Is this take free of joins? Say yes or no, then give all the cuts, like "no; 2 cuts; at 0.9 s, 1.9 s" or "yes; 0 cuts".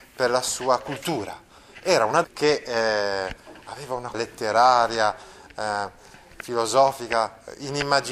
no; 2 cuts; at 2.2 s, 4.1 s